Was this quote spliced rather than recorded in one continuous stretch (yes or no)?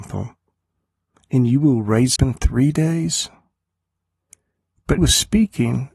yes